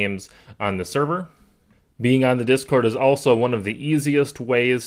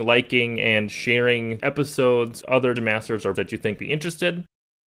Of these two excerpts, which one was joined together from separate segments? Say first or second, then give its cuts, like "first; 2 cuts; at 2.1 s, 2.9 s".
second; 5 cuts; at 1.6 s, 2.4 s, 2.8 s, 3.3 s, 3.8 s